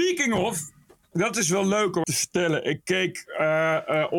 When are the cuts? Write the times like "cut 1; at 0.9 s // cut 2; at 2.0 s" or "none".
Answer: cut 1; at 2.0 s